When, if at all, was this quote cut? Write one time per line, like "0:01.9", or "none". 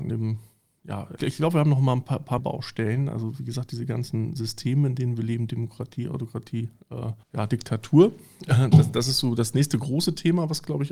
0:01.2
0:02.4
0:07.2

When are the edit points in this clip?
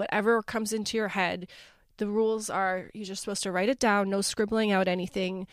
none

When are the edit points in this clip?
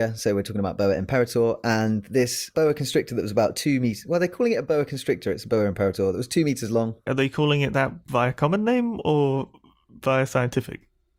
none

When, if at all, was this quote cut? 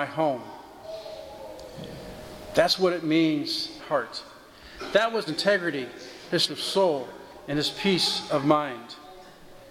0:03.8
0:05.3
0:06.4

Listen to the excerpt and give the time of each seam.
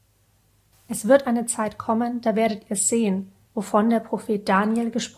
none

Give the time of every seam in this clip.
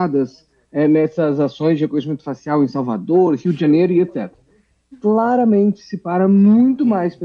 none

